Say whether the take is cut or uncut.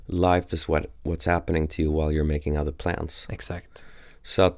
uncut